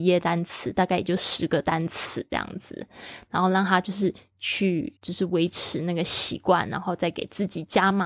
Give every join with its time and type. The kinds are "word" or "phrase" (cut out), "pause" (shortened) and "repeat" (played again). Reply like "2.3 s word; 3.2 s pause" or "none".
5.0 s pause